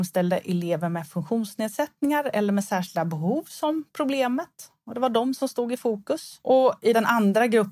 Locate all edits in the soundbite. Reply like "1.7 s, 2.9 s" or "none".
none